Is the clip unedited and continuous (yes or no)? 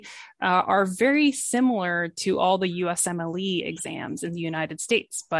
yes